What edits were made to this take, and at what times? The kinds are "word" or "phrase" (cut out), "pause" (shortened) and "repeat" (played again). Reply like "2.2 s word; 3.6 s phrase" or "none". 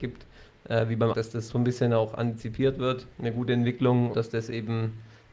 1.1 s word; 1.5 s word; 3.1 s pause; 4.1 s word